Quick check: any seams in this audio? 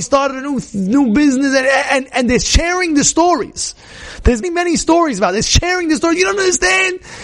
yes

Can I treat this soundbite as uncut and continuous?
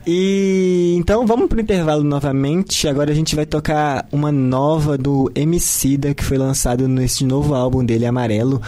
yes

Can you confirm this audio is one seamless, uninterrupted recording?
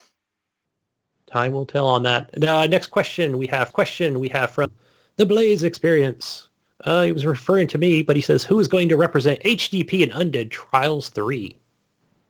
no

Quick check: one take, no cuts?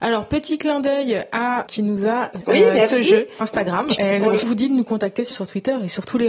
no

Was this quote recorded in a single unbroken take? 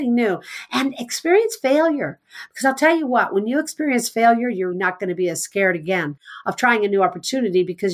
no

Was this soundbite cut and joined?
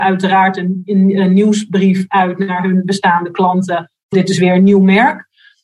yes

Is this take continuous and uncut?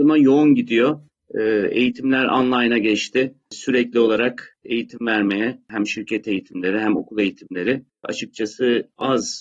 yes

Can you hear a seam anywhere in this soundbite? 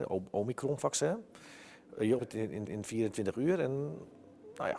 yes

